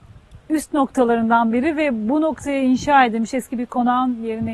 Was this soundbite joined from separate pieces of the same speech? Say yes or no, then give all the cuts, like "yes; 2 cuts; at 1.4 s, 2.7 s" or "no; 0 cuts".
no; 0 cuts